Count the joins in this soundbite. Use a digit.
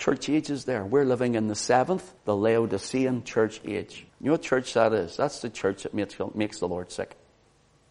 2